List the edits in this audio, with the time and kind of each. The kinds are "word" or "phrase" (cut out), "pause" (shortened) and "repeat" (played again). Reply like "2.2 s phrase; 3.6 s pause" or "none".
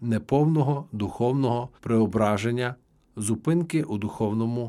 1.8 s pause